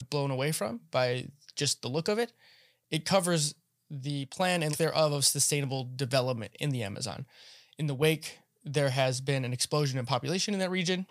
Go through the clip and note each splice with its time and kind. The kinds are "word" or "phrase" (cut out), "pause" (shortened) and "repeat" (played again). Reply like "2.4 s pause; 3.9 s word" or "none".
4.7 s word